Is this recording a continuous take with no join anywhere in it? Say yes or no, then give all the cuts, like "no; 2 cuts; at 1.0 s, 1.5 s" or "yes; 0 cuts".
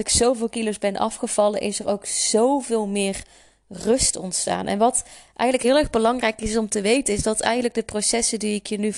yes; 0 cuts